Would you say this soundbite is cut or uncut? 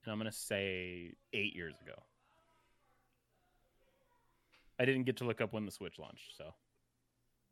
cut